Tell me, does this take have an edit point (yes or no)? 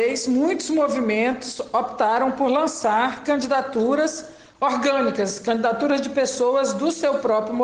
no